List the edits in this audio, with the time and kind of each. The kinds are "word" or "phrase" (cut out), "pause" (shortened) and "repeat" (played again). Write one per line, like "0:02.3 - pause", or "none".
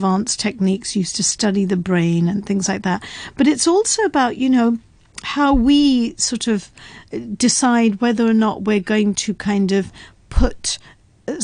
none